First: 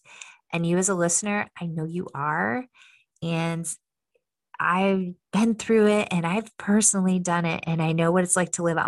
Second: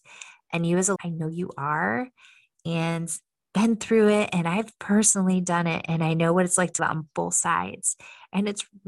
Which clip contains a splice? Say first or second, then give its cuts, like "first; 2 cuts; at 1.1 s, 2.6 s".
second; 3 cuts; at 1.0 s, 3.4 s, 6.8 s